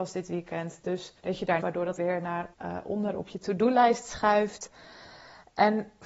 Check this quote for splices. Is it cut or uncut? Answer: cut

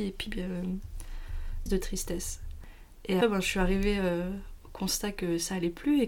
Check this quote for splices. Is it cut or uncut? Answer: cut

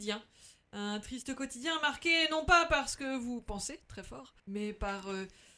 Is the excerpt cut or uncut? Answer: cut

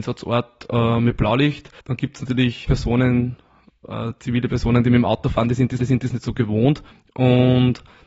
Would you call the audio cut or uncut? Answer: cut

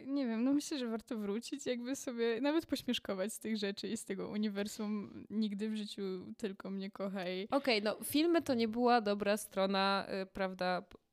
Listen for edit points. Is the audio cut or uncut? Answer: uncut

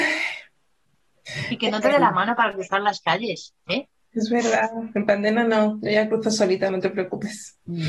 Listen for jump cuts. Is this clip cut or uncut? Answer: uncut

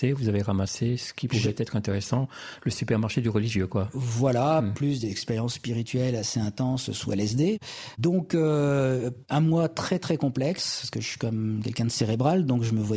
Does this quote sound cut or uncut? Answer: uncut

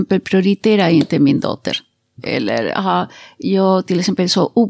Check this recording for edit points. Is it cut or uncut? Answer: uncut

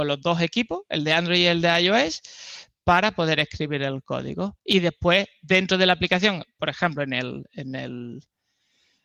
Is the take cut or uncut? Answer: uncut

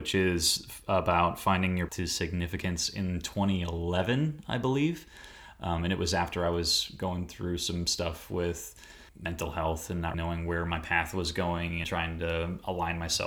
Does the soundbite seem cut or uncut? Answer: cut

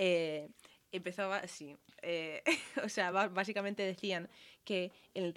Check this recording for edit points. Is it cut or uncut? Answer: uncut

